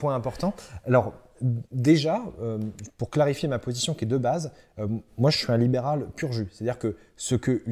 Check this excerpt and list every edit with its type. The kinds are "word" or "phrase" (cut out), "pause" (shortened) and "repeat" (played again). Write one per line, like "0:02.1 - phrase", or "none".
none